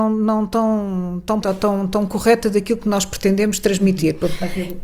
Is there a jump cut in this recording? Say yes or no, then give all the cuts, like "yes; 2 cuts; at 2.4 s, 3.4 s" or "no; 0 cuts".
yes; 2 cuts; at 1.4 s, 1.9 s